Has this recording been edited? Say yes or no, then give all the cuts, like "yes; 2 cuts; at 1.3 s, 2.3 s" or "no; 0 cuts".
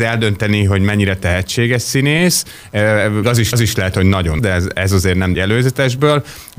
yes; 4 cuts; at 3.2 s, 3.5 s, 4.4 s, 5.3 s